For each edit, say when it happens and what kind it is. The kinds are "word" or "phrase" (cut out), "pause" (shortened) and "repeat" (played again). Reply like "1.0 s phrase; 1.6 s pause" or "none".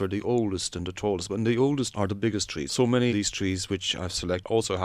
1.9 s word; 2.7 s word; 3.1 s word